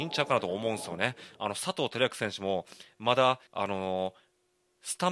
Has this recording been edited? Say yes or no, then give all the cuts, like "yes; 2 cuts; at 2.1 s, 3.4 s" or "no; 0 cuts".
yes; 1 cut; at 3.5 s